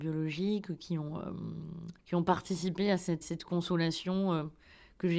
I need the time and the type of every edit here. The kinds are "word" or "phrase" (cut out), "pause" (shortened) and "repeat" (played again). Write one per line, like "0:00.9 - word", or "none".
0:02.0 - pause
0:03.2 - word